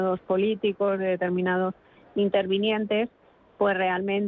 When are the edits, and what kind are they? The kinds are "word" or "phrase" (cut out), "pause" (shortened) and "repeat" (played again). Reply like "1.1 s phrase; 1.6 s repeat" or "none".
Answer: none

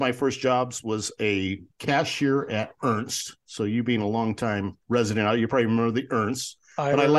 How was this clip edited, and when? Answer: 1.7 s pause; 4.8 s pause

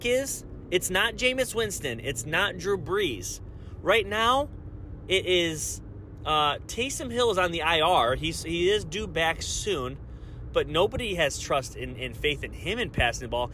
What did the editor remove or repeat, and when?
none

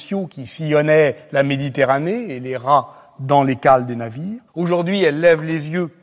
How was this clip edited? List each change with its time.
4.5 s pause

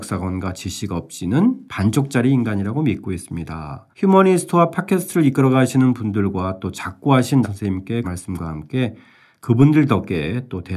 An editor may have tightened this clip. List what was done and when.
1.7 s pause; 3.9 s pause; 7.4 s word; 8.0 s word

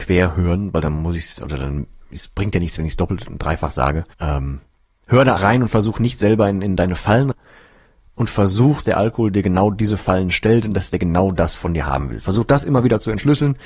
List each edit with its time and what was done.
4.1 s pause; 5.4 s word; 7.3 s phrase; 8.8 s phrase

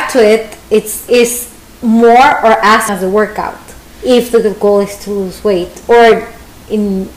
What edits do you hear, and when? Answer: 1.1 s word; 1.6 s pause; 2.9 s word

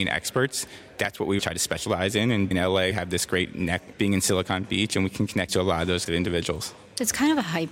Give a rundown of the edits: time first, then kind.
1.4 s word; 2.5 s word; 2.9 s word; 3.9 s word; 5.5 s word; 6.1 s word

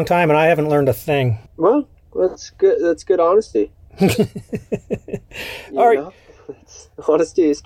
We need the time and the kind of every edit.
1.5 s pause

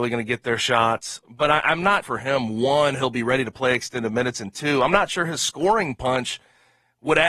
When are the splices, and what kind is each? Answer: 2.0 s word

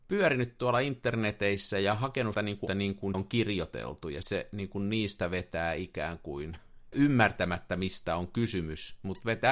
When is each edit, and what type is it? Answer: 2.3 s word; 2.7 s word; 3.1 s word; 4.2 s word; 6.9 s word

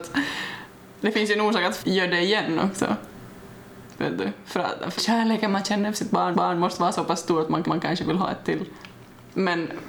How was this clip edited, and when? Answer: 1.8 s word; 5.0 s word; 6.3 s repeat; 7.6 s repeat

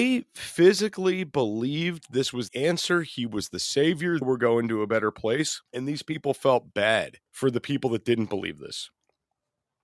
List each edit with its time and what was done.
2.5 s word; 4.2 s word; 5.7 s pause; 7.3 s pause

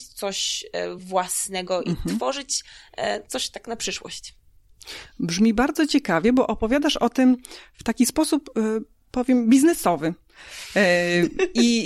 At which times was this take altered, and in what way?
none

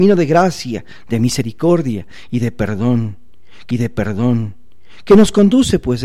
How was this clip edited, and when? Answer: 3.7 s repeat

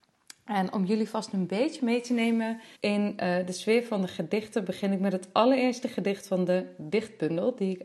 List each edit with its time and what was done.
2.7 s pause

